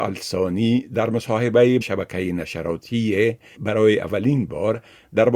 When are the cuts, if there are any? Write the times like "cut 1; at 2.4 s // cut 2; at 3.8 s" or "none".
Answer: cut 1; at 1.8 s // cut 2; at 3.5 s